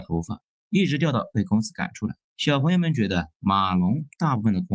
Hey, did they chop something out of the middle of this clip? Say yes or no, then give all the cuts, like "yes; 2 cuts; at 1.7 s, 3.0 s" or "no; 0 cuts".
yes; 2 cuts; at 2.2 s, 3.4 s